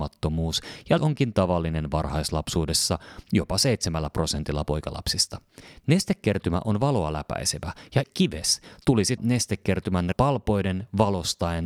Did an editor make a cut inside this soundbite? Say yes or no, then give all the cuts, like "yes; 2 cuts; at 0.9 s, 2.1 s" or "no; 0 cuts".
yes; 4 cuts; at 1.0 s, 8.0 s, 9.2 s, 10.1 s